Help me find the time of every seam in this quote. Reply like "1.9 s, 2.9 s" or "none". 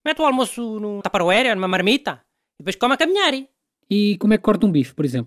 1.0 s